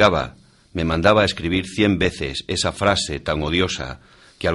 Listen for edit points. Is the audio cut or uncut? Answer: uncut